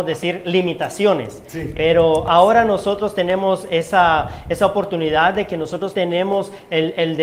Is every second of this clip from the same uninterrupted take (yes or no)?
no